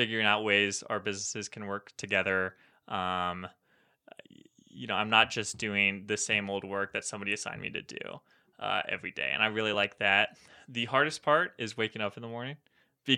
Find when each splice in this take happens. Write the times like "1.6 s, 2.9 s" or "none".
none